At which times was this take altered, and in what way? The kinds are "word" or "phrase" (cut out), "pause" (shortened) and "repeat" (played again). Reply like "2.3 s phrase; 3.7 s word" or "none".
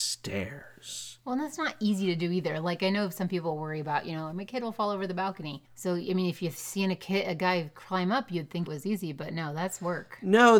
5.7 s pause; 8.7 s word